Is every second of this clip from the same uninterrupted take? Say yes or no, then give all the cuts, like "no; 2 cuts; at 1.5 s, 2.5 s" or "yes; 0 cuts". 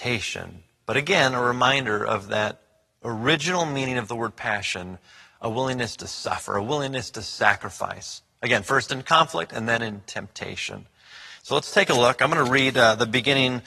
yes; 0 cuts